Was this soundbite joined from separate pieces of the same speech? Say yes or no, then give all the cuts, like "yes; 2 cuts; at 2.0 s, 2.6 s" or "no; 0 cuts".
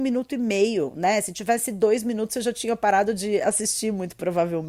no; 0 cuts